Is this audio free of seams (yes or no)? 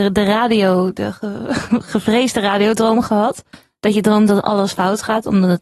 yes